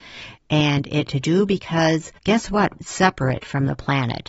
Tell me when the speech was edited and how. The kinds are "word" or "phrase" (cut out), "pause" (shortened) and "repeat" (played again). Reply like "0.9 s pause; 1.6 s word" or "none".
1.1 s phrase; 2.2 s pause; 2.8 s phrase